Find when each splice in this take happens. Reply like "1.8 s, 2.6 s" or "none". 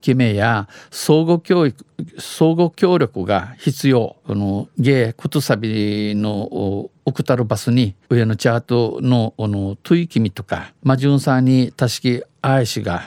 4.2 s, 7.0 s, 8.0 s, 10.8 s